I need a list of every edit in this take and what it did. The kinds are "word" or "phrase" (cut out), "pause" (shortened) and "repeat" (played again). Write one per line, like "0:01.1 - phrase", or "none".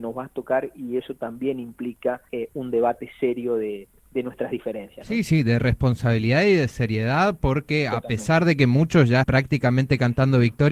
0:02.3 - pause
0:05.2 - word
0:09.2 - word